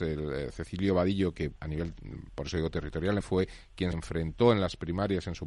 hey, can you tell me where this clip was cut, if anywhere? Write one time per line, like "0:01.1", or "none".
0:01.6
0:03.2
0:03.9